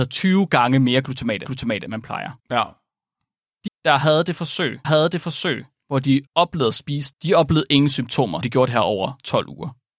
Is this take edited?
yes; 7 cuts; at 1.4 s, 2.4 s, 3.7 s, 4.8 s, 6.3 s, 7.1 s, 8.4 s

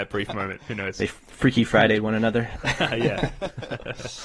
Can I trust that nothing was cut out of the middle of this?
yes; 0 cuts

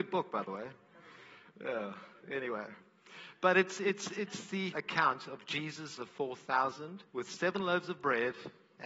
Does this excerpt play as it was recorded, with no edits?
no; 3 cuts; at 4.7 s, 6.0 s, 7.1 s

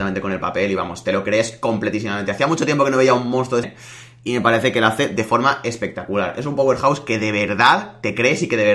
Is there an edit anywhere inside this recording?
yes; 1 cut; at 3.6 s

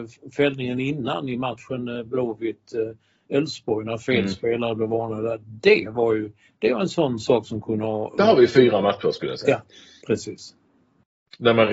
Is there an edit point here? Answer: no; 0 cuts

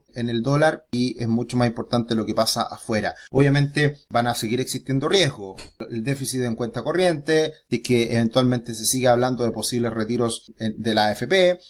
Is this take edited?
no; 0 cuts

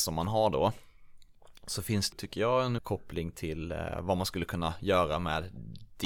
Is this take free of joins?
no; 2 cuts; at 2.1 s, 2.8 s

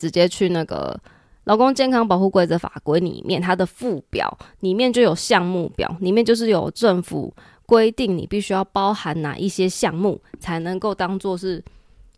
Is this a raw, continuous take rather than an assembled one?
yes; 0 cuts

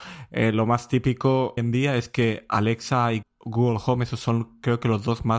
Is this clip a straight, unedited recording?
no; 2 cuts; at 1.6 s, 3.2 s

